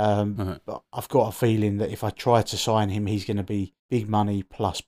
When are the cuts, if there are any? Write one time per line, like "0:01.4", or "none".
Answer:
0:03.8